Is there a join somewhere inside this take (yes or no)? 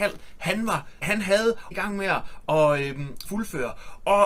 yes